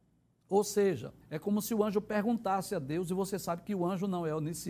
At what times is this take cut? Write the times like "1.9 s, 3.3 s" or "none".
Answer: 1.2 s